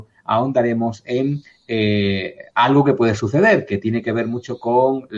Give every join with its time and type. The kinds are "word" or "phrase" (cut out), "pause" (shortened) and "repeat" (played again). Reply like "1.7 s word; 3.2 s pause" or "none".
none